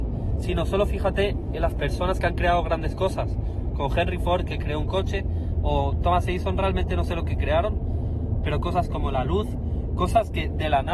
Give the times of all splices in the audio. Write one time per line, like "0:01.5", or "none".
none